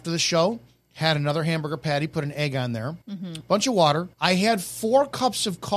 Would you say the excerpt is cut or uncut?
cut